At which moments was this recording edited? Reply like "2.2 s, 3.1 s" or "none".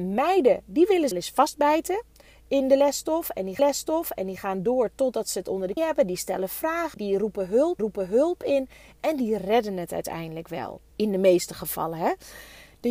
1.1 s, 3.6 s, 5.8 s, 6.9 s, 7.8 s, 10.9 s